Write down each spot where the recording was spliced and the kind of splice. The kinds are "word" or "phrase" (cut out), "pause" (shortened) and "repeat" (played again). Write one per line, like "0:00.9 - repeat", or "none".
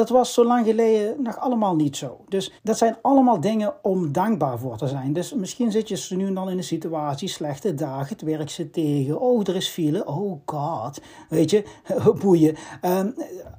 0:02.6 - pause